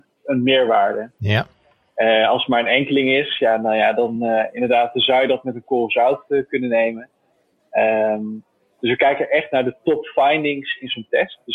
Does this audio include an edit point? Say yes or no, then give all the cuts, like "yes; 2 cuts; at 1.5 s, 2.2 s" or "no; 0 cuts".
no; 0 cuts